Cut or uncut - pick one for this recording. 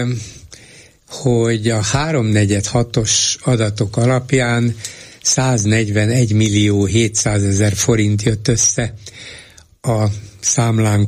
uncut